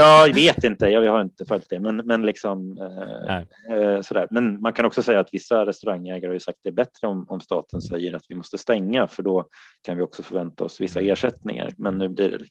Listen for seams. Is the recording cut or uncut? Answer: uncut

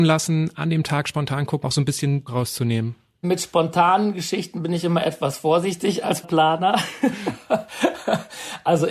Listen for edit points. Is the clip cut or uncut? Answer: cut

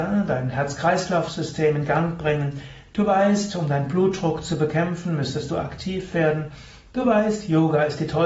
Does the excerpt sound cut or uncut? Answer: uncut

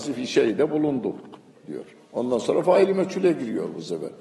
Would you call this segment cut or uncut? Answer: uncut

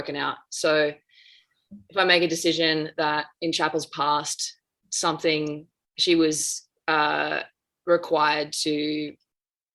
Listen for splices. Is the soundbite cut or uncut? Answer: uncut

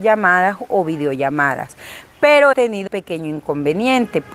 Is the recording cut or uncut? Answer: cut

